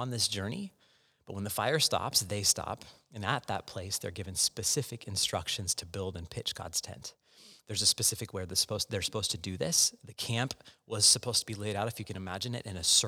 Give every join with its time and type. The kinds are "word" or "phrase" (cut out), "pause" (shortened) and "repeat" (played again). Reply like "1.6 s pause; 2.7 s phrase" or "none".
none